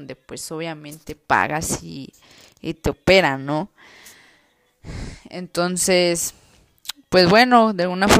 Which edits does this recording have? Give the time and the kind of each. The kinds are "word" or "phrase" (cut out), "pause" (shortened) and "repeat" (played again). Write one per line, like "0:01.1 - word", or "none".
none

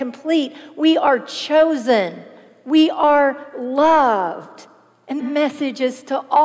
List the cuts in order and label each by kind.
0:05.2 - word

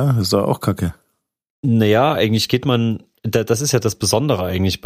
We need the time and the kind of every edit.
none

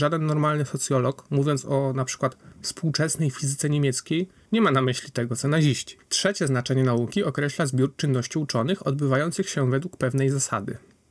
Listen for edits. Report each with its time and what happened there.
0:06.0 - pause

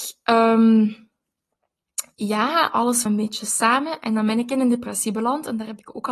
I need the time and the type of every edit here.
0:03.1 - word

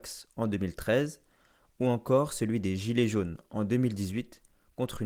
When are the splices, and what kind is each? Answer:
none

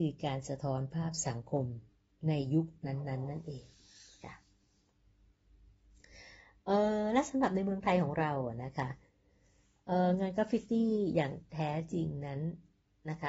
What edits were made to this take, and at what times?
none

